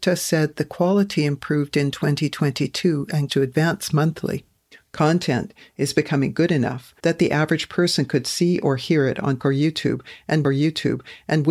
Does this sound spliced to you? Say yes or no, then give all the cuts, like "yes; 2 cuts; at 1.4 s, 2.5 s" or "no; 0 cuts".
yes; 5 cuts; at 3.3 s, 4.7 s, 7.0 s, 9.4 s, 10.4 s